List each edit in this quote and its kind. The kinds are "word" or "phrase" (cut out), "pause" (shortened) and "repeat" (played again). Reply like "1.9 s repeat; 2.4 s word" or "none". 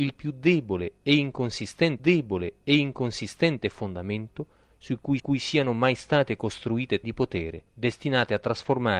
2.0 s repeat; 5.2 s repeat; 7.0 s word; 7.7 s pause